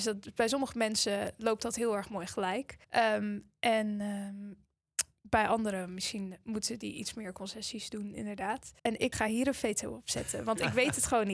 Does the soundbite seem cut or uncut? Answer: cut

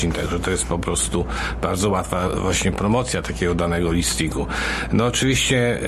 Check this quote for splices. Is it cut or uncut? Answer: uncut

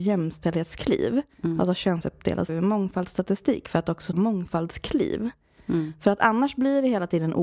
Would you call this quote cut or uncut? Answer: cut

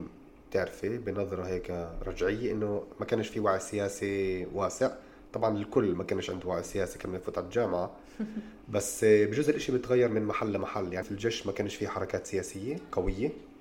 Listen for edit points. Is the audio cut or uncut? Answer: cut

